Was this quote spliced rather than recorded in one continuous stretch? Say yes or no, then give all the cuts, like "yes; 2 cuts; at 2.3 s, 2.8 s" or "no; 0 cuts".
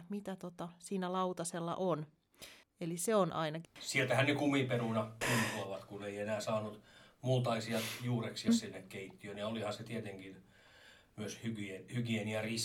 yes; 4 cuts; at 2.6 s, 3.6 s, 5.2 s, 8.5 s